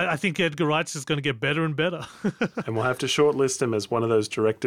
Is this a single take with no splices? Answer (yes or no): yes